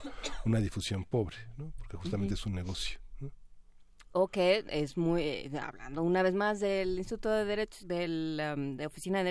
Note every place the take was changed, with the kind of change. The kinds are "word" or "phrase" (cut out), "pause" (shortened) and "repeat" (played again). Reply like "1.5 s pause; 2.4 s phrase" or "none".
7.8 s phrase